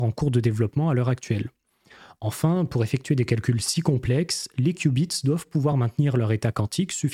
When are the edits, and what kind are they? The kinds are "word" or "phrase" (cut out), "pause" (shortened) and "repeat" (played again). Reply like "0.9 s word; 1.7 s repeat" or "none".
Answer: none